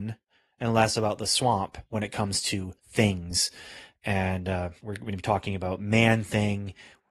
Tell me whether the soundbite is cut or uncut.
cut